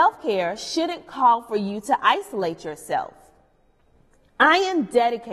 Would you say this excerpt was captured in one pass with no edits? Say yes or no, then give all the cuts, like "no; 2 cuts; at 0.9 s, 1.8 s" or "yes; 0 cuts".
yes; 0 cuts